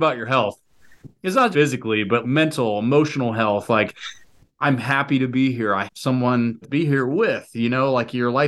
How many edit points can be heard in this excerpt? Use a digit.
4